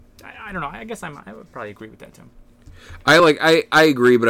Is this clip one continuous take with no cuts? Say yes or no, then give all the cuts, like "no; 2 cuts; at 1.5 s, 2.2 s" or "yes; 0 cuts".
yes; 0 cuts